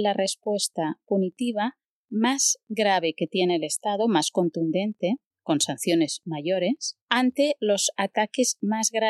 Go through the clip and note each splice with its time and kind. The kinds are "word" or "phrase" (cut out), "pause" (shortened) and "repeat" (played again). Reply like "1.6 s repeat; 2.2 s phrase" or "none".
5.3 s pause; 7.0 s pause

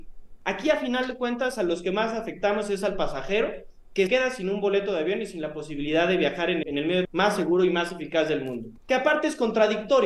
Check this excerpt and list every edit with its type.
4.1 s word; 6.6 s word; 7.0 s word; 8.8 s pause

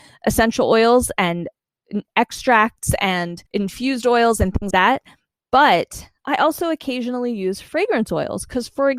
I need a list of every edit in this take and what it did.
3.5 s pause; 4.7 s word

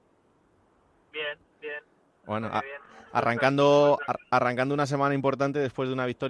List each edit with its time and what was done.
none

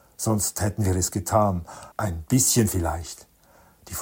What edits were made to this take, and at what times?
1.9 s pause

